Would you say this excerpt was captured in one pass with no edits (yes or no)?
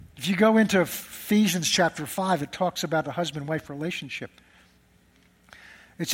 yes